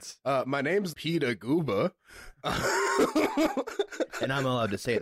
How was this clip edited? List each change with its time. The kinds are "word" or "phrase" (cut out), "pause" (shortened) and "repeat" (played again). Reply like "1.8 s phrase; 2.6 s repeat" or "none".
0.9 s word